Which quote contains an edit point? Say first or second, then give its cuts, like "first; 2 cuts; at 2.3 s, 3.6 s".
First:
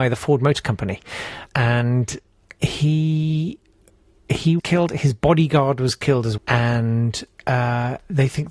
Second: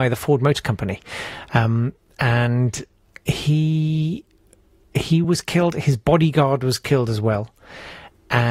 first; 3 cuts; at 1.5 s, 4.6 s, 6.4 s